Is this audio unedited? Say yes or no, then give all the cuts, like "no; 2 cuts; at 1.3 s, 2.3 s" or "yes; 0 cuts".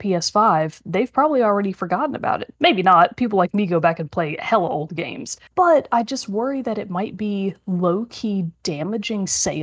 no; 1 cut; at 5.5 s